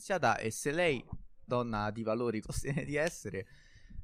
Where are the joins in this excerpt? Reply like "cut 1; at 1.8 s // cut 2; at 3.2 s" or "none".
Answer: cut 1; at 1.5 s // cut 2; at 2.4 s